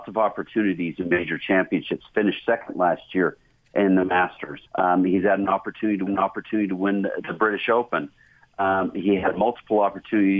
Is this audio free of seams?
no; 3 cuts; at 4.7 s, 6.1 s, 7.2 s

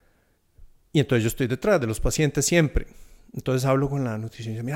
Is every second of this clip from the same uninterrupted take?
yes; 0 cuts

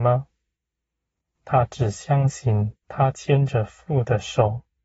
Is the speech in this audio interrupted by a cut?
yes; 1 cut; at 2.8 s

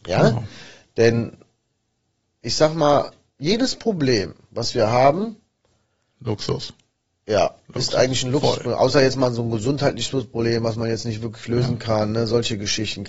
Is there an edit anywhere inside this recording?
no; 0 cuts

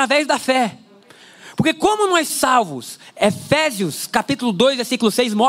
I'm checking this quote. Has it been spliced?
yes; 1 cut; at 2.3 s

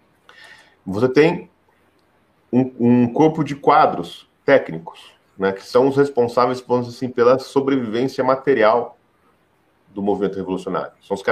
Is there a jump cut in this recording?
no; 0 cuts

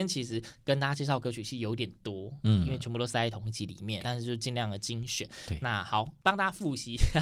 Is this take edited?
yes; 1 cut; at 4.0 s

